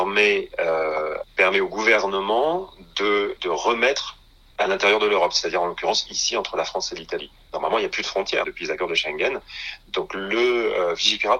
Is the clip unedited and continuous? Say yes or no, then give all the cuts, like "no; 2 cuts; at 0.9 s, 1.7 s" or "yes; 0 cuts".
no; 3 cuts; at 3.4 s, 4.5 s, 8.4 s